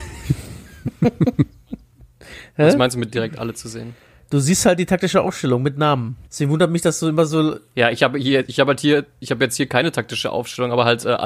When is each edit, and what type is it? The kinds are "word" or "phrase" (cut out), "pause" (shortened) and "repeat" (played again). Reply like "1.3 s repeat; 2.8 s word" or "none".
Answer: 6.3 s pause